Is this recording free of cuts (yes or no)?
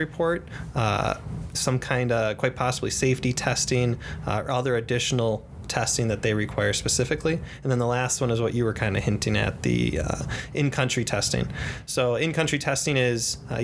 yes